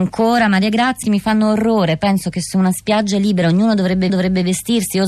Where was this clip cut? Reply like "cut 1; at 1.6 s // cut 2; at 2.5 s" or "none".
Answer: cut 1; at 1.0 s // cut 2; at 4.1 s